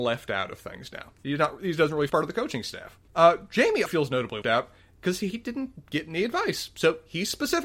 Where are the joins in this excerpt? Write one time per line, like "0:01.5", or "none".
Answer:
0:01.2
0:02.1
0:03.1
0:03.9
0:04.4